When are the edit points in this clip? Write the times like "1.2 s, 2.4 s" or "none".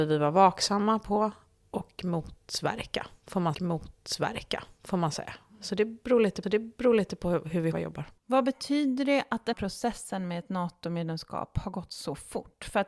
3.5 s, 6.4 s, 7.7 s, 8.2 s, 9.5 s